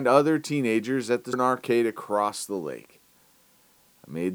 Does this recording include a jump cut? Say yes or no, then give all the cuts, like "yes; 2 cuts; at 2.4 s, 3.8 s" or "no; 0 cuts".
yes; 1 cut; at 1.3 s